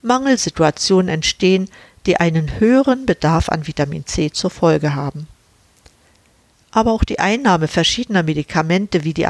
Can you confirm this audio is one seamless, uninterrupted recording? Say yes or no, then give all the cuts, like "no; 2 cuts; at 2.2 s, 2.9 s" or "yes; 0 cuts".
yes; 0 cuts